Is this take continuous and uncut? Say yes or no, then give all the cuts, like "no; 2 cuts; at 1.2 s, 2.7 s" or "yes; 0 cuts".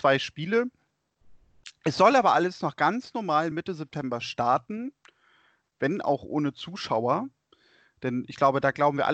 yes; 0 cuts